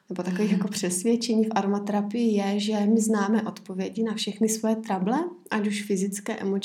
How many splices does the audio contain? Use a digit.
0